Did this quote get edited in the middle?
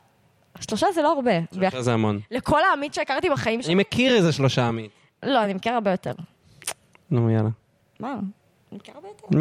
no; 0 cuts

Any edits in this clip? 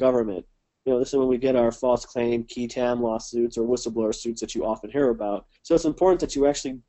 yes; 1 cut; at 5.6 s

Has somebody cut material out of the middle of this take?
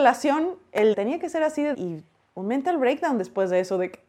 yes; 2 cuts; at 0.9 s, 1.7 s

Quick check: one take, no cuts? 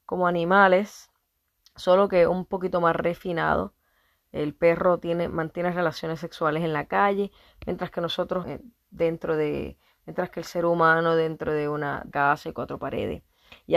no; 2 cuts; at 8.4 s, 12.1 s

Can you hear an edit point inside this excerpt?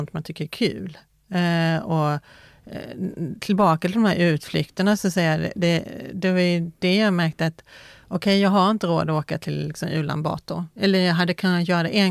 no; 0 cuts

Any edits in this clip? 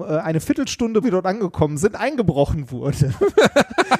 yes; 1 cut; at 1.0 s

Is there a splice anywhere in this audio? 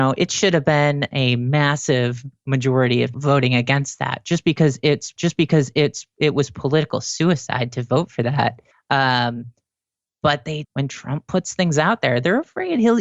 yes; 4 cuts; at 3.1 s, 5.2 s, 8.7 s, 10.6 s

